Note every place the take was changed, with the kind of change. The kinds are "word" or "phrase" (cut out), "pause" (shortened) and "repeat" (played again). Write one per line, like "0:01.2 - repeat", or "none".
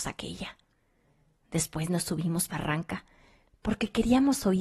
0:02.5 - phrase